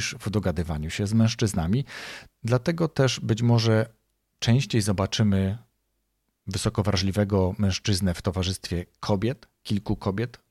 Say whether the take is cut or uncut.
uncut